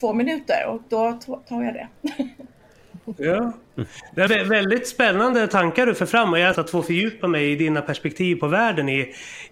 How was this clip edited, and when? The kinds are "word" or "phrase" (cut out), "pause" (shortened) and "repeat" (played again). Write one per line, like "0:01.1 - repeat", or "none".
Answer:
0:04.3 - word
0:06.5 - phrase